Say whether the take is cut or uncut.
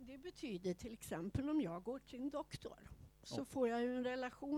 uncut